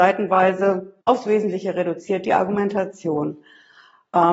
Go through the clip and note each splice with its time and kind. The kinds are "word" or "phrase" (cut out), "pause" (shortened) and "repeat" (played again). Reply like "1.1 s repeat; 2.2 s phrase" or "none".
1.0 s pause